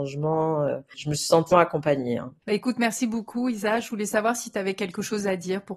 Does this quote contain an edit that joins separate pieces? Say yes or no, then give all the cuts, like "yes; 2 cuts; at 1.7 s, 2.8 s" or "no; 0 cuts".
yes; 1 cut; at 1.5 s